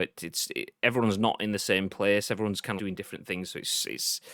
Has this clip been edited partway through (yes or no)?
yes